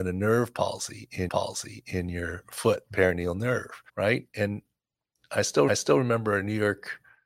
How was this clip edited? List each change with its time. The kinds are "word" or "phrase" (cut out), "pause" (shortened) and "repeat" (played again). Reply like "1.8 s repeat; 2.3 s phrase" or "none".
1.3 s repeat; 3.9 s pause; 5.7 s repeat